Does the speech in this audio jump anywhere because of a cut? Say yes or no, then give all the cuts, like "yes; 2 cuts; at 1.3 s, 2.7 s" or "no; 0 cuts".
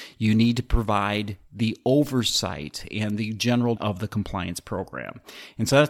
yes; 1 cut; at 3.8 s